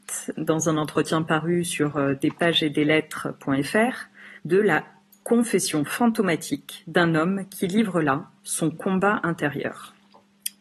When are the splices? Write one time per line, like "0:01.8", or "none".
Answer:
0:04.4